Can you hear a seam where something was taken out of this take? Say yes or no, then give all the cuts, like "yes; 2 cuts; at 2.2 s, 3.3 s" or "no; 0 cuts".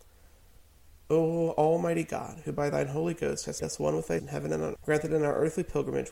yes; 3 cuts; at 3.6 s, 4.2 s, 4.8 s